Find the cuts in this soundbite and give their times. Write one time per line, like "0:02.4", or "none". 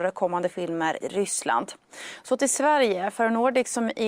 0:01.0